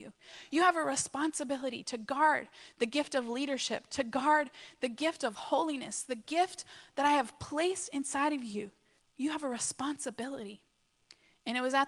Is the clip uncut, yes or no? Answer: no